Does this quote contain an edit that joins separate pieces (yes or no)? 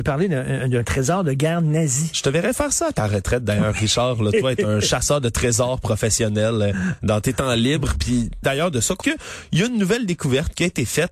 yes